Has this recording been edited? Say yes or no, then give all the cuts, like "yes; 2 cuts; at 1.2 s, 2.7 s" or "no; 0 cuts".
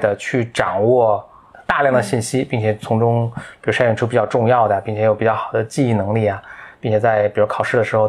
no; 0 cuts